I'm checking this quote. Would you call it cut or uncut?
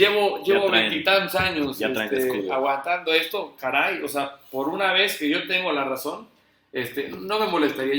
uncut